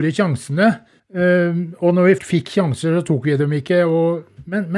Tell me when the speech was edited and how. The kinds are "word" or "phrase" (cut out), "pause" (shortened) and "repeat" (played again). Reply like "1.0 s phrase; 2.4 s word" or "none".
1.0 s pause; 2.2 s word